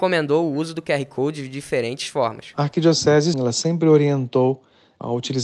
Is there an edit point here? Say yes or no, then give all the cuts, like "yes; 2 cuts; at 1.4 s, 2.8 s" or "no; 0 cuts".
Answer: yes; 1 cut; at 3.3 s